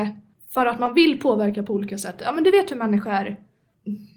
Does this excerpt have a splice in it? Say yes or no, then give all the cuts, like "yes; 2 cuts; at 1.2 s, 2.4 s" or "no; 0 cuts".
no; 0 cuts